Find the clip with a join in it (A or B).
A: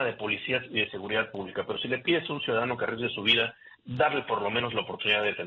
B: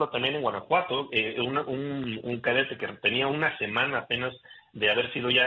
A